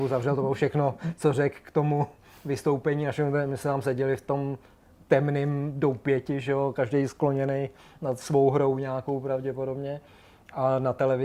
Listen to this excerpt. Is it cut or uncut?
uncut